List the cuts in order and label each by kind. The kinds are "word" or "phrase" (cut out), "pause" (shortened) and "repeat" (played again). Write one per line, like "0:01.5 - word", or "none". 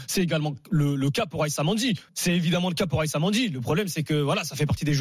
0:02.1 - pause